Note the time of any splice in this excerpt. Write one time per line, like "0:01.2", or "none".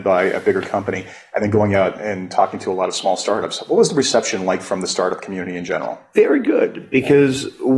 none